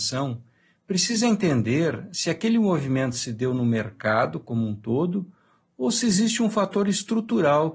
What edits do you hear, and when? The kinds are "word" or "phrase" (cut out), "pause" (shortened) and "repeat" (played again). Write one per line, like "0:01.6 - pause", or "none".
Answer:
none